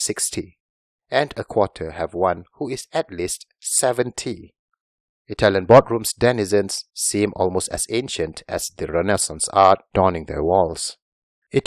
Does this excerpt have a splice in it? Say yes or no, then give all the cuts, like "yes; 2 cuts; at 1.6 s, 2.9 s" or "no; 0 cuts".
no; 0 cuts